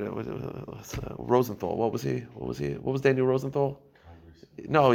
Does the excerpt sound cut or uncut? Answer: uncut